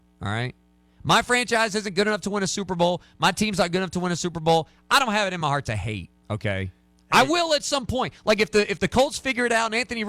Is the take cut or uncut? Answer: uncut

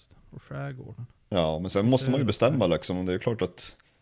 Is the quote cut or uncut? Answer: uncut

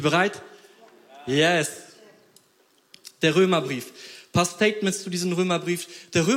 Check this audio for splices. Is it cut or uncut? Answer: uncut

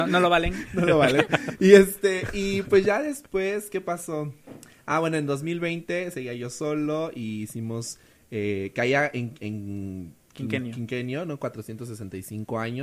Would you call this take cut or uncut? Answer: uncut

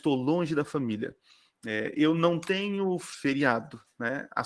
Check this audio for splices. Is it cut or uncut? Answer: uncut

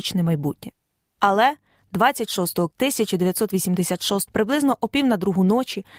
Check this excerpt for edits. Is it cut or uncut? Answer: cut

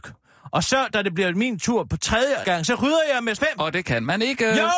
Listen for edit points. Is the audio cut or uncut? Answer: cut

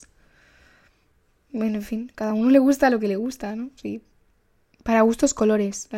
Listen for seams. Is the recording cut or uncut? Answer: uncut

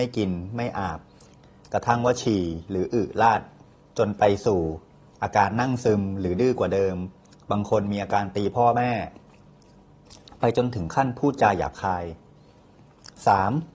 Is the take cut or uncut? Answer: uncut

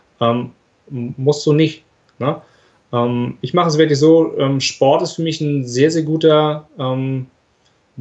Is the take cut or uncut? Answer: uncut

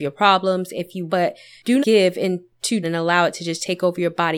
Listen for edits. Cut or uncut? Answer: cut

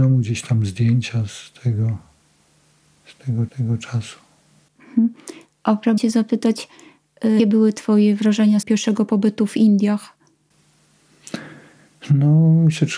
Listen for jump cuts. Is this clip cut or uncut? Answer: cut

